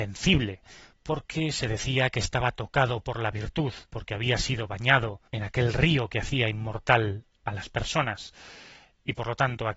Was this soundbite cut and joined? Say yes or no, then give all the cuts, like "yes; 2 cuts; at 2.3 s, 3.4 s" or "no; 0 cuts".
yes; 2 cuts; at 3.8 s, 5.3 s